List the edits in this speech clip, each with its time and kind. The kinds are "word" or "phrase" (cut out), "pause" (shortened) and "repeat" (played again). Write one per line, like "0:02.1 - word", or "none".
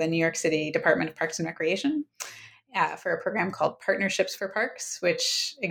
none